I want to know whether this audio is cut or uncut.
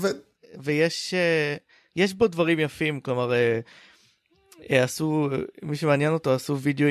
uncut